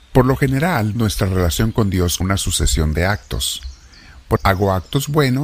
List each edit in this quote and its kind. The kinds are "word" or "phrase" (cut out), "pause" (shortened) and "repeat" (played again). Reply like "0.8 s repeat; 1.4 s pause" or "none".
1.0 s word; 2.2 s word; 4.4 s word